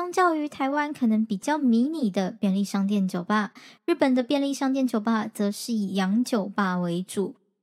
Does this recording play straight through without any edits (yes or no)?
yes